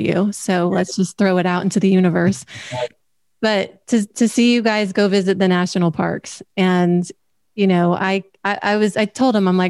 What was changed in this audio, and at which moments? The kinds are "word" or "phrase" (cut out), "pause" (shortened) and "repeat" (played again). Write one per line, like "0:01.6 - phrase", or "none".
none